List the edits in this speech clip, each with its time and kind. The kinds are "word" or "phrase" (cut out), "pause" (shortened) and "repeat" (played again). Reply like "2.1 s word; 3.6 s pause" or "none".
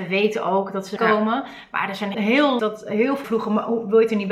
1.0 s phrase; 2.1 s word; 2.6 s phrase; 3.2 s word

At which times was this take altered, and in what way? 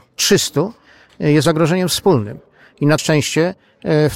1.4 s word; 3.0 s word

